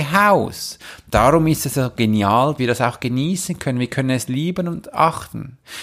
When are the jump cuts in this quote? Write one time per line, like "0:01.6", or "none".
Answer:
0:02.6